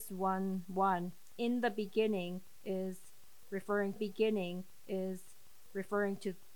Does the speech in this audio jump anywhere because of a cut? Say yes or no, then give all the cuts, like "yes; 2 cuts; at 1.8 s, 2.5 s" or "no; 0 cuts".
yes; 1 cut; at 4.0 s